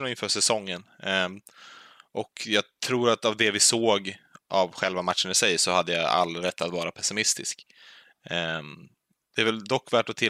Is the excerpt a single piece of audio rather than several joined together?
yes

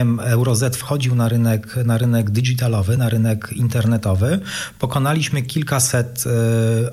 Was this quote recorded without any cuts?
yes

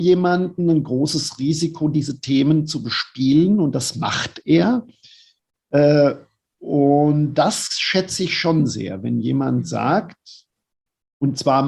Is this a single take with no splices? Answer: yes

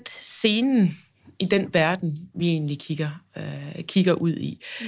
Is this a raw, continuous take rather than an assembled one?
yes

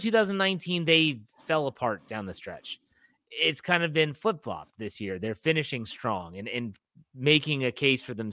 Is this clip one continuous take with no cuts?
yes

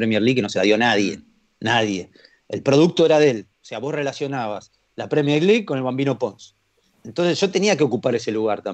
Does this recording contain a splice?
no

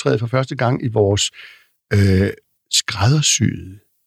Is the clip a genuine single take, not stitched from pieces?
yes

